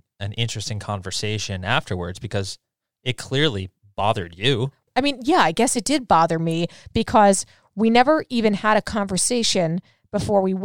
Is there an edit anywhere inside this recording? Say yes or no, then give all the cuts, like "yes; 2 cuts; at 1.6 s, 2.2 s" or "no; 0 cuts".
no; 0 cuts